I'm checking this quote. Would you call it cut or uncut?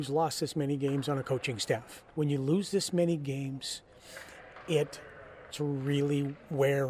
cut